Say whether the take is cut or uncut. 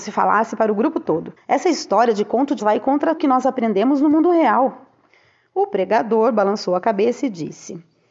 cut